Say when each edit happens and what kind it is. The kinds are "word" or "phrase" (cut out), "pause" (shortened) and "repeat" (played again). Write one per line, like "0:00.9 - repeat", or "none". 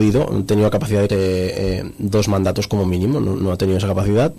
0:01.1 - word